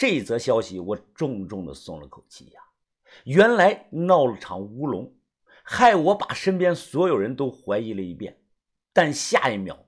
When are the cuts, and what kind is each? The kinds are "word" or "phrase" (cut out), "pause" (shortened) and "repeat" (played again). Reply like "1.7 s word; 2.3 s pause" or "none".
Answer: none